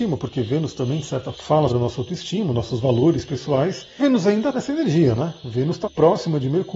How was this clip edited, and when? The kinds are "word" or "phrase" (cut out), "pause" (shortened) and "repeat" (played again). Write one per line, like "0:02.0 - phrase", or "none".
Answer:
0:01.3 - word
0:01.7 - word
0:04.0 - word
0:04.5 - word
0:05.8 - word